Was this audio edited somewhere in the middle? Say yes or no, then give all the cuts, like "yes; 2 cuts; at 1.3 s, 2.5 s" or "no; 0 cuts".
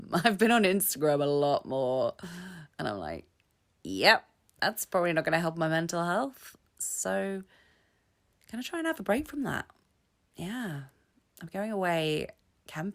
no; 0 cuts